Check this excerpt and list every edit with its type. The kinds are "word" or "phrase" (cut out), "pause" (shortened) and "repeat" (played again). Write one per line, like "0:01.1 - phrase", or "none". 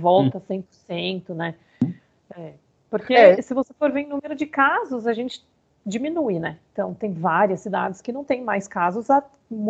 none